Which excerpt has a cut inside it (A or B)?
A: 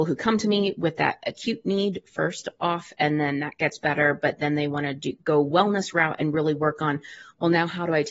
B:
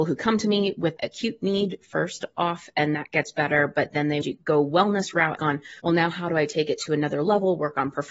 B